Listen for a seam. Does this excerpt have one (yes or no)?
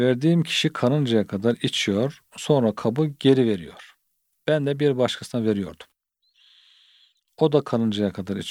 no